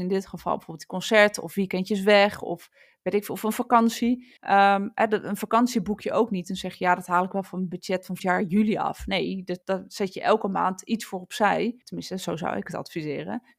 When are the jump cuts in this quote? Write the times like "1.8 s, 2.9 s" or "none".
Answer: 4.4 s, 8.2 s, 9.6 s, 11.8 s